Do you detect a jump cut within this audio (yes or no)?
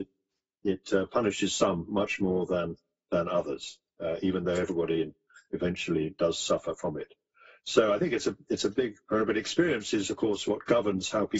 no